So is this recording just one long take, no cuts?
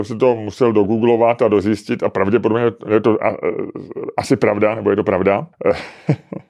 no; 1 cut; at 5.5 s

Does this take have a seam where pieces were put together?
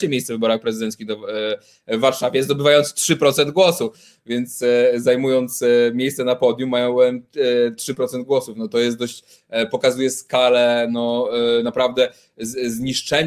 no; 0 cuts

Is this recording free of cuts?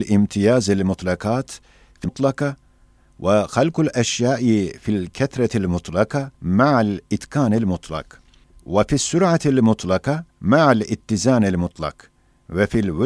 no; 4 cuts; at 2.0 s, 6.3 s, 8.4 s, 10.3 s

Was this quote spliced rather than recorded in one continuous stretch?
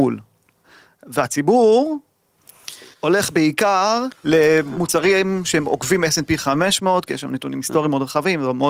yes; 2 cuts; at 2.9 s, 4.2 s

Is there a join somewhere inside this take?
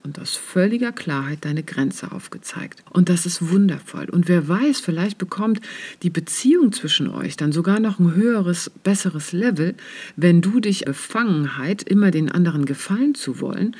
yes; 2 cuts; at 2.9 s, 10.8 s

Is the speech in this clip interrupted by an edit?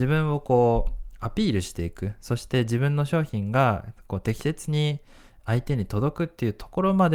yes; 1 cut; at 5.4 s

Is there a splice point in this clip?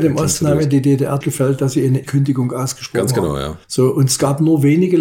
yes; 3 cuts; at 1.2 s, 2.0 s, 3.6 s

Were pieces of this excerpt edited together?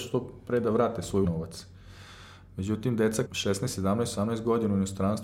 yes; 2 cuts; at 1.2 s, 3.2 s

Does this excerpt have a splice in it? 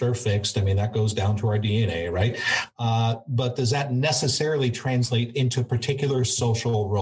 no; 0 cuts

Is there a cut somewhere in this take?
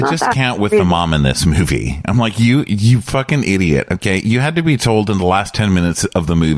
no; 0 cuts

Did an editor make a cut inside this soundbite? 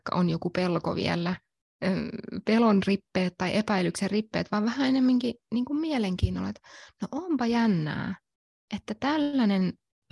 no; 0 cuts

